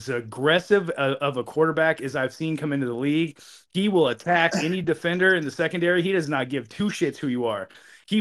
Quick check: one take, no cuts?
yes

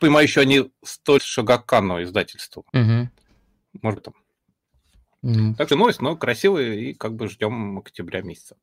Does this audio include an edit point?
yes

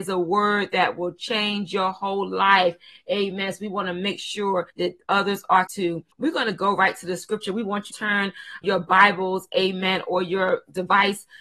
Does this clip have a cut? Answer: yes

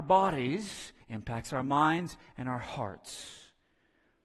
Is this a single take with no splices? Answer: no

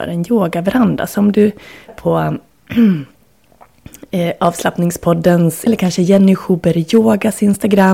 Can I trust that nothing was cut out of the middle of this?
no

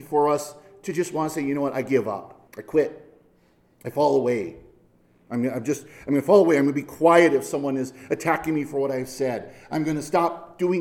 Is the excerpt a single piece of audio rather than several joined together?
no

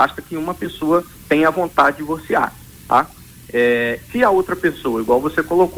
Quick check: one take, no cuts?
no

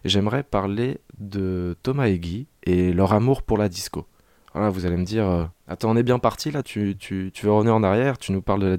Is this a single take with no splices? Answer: no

